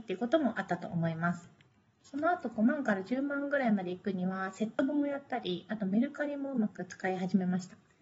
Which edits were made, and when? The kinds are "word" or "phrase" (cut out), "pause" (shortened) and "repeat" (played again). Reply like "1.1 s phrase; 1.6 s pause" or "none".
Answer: 1.7 s pause